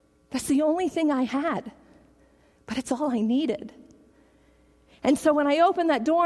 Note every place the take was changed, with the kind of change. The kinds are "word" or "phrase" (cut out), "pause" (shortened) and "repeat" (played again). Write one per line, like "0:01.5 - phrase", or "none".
none